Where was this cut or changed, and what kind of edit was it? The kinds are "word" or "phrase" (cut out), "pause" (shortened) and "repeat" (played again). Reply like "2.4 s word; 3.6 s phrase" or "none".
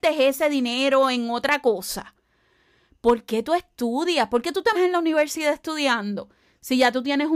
4.7 s word